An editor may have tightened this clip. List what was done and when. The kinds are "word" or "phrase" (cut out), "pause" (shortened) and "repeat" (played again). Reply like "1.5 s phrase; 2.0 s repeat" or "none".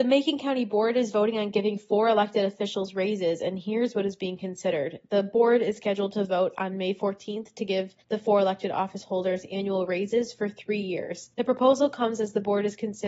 8.0 s pause; 11.3 s pause

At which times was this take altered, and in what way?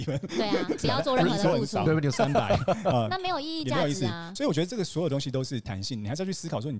2.1 s phrase

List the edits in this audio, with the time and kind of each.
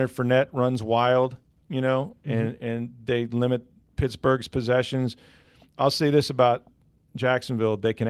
none

